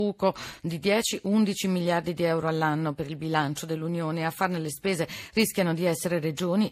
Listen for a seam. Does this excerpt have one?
no; 0 cuts

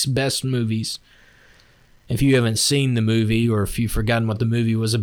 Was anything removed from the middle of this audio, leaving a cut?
no; 0 cuts

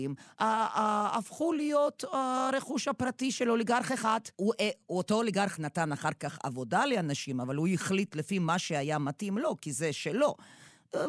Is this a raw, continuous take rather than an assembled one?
no; 1 cut; at 4.3 s

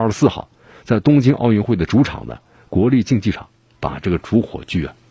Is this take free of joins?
yes; 0 cuts

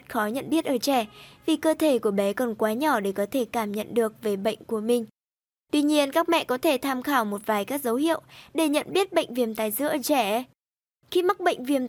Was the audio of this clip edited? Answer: no; 0 cuts

